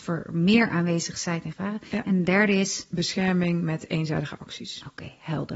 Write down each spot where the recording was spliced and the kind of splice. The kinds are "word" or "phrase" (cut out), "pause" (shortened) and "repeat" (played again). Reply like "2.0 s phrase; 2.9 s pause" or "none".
1.5 s word